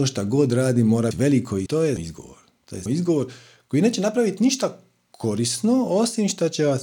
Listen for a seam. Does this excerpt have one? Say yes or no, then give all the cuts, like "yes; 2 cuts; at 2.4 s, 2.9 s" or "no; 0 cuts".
yes; 4 cuts; at 1.1 s, 1.7 s, 2.0 s, 2.9 s